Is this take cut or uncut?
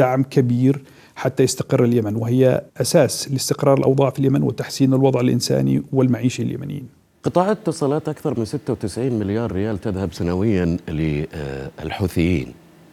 cut